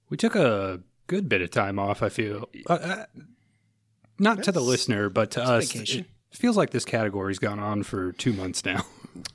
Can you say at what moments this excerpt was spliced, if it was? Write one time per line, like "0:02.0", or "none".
none